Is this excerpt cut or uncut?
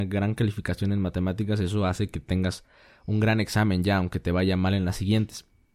uncut